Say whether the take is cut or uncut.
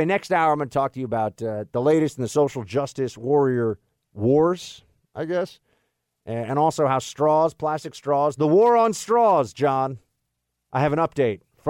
uncut